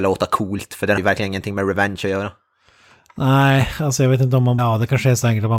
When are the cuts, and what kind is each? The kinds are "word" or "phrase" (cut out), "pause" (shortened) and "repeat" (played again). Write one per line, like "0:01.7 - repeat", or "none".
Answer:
0:01.0 - word
0:04.6 - word